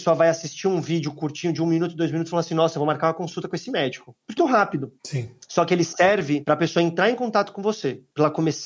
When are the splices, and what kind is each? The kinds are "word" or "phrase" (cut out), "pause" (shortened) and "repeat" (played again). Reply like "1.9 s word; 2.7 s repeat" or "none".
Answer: 4.4 s word

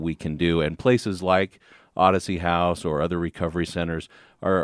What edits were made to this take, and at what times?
none

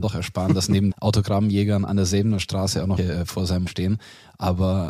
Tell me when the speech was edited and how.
0.9 s word; 3.0 s word; 3.7 s word

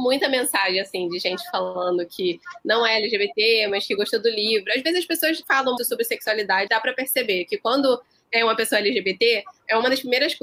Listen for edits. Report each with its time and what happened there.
5.4 s word; 5.8 s word; 6.7 s word

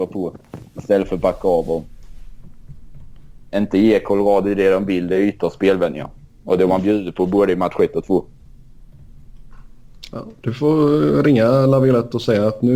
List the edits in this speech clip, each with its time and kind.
none

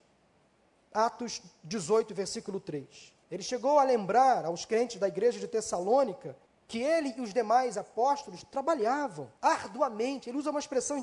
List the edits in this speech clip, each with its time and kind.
3.2 s pause; 6.5 s pause; 9.4 s pause

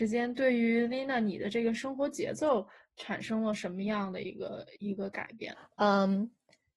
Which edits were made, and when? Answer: none

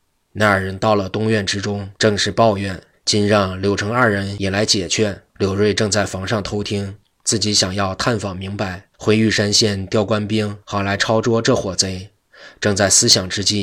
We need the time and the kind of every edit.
2.0 s pause; 2.9 s pause; 5.3 s pause; 8.9 s pause; 10.6 s pause

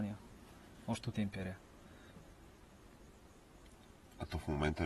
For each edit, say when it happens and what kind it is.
1.1 s word

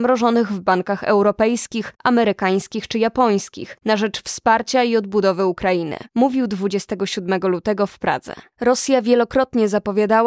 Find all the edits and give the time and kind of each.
6.1 s pause

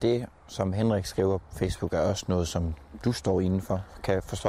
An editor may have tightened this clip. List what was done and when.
1.4 s word

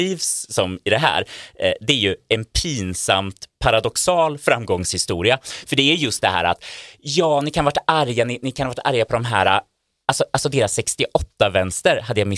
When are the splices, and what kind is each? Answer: none

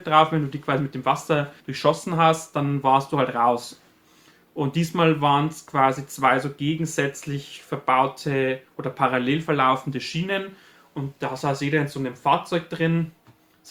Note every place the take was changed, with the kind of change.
1.6 s pause

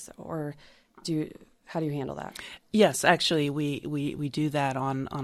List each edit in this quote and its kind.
none

